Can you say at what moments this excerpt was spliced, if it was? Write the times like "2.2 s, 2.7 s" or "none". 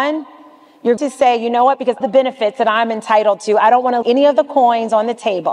1.0 s, 2.0 s, 4.0 s